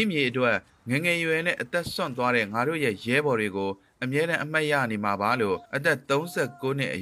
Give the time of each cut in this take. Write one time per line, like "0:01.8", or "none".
0:05.6